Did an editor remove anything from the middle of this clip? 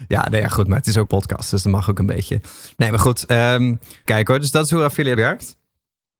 yes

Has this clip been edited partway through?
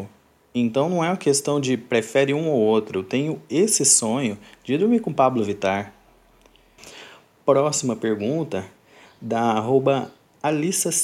no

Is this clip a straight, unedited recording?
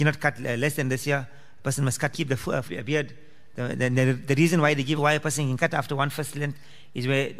no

